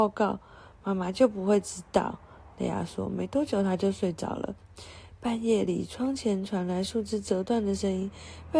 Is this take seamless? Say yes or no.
yes